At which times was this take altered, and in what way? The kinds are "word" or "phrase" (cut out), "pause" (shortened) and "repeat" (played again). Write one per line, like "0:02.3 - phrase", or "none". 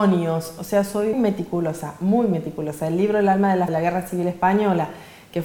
0:01.1 - word
0:03.7 - phrase